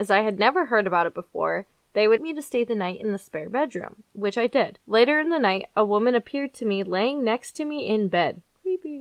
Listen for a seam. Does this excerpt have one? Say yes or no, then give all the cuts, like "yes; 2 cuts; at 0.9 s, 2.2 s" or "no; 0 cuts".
yes; 2 cuts; at 2.2 s, 4.8 s